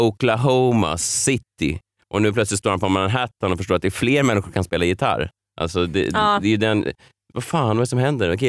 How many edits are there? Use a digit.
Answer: 0